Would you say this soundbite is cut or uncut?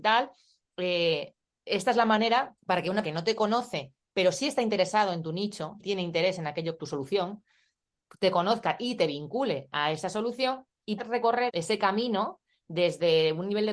cut